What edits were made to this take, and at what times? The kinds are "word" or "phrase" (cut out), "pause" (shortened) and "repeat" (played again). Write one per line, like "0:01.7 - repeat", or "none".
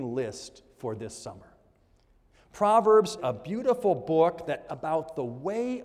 0:03.2 - word
0:04.7 - word